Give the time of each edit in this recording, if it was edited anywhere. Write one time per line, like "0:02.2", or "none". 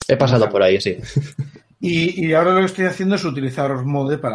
none